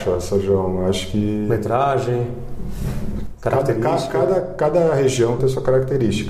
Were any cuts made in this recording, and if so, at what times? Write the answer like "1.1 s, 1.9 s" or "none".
5.4 s